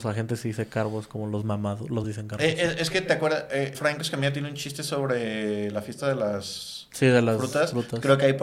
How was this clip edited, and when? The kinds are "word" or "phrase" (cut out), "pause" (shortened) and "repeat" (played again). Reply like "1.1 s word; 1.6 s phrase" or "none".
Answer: 2.0 s word; 3.7 s word